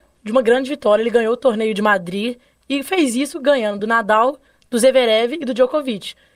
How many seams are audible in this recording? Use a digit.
0